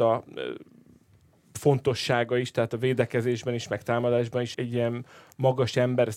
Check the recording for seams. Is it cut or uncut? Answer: cut